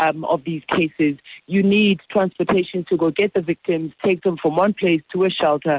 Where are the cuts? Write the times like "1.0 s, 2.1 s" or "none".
none